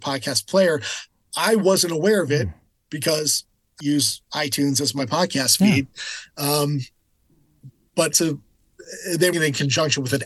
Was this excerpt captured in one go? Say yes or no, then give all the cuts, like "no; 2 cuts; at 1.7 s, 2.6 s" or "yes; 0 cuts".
no; 3 cuts; at 3.8 s, 8.1 s, 9.3 s